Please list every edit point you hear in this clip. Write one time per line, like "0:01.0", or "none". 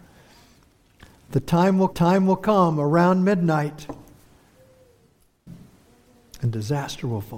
0:01.9

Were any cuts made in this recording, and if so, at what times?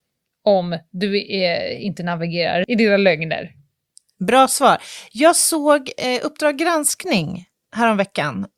0:02.6

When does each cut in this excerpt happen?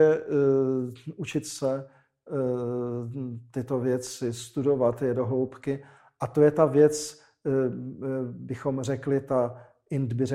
none

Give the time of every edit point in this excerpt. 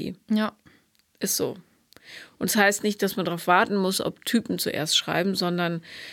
none

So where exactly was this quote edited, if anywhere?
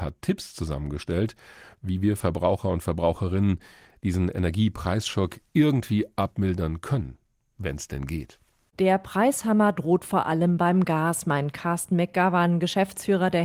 none

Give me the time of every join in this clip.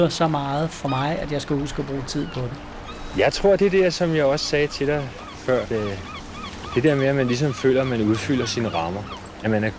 0:05.7

